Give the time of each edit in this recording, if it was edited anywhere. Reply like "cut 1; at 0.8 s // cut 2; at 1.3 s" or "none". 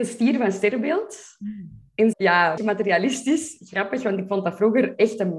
cut 1; at 2.1 s // cut 2; at 2.6 s